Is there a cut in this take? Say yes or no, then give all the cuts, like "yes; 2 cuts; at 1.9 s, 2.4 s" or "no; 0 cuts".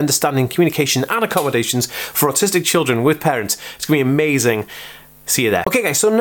no; 0 cuts